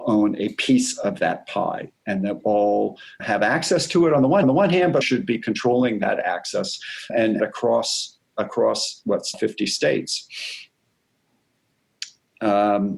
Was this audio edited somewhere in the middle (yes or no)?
yes